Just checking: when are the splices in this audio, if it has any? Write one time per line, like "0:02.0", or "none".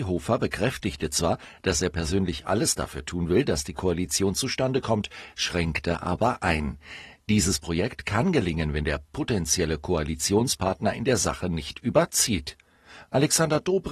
none